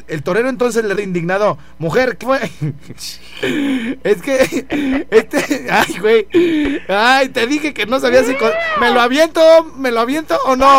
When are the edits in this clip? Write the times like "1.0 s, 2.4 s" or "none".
0.9 s, 2.2 s